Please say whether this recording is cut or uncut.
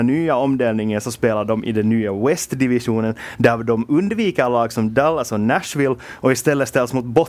uncut